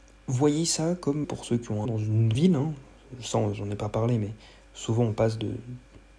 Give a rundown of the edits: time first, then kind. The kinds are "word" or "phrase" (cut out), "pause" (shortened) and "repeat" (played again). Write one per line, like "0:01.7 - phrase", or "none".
0:01.2 - word
0:01.9 - phrase
0:02.4 - word